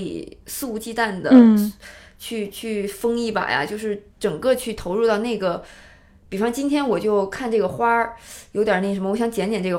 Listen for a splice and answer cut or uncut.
uncut